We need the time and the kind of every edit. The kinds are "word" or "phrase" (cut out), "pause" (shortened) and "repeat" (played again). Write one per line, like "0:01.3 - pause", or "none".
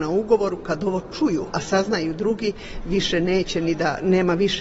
none